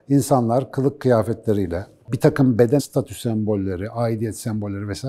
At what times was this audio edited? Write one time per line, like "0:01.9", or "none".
0:02.0
0:02.8